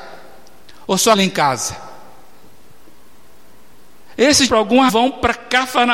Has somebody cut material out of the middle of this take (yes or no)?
yes